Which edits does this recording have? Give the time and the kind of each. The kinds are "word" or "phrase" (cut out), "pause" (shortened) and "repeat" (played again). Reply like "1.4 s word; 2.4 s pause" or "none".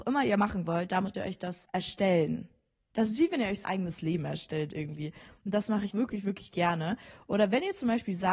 1.1 s word; 1.7 s word; 3.6 s word; 5.9 s word